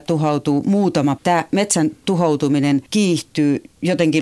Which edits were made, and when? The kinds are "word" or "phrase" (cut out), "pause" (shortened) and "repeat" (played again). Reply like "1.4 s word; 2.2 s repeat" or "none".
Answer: 1.2 s word; 2.9 s pause